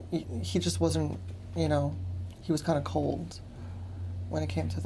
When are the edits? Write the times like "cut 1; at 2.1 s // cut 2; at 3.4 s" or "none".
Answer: none